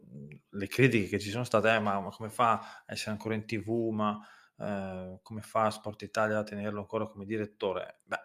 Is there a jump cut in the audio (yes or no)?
no